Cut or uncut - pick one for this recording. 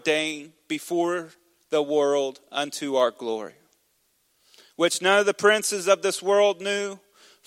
uncut